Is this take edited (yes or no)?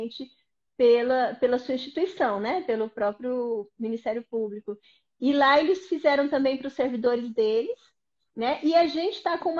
no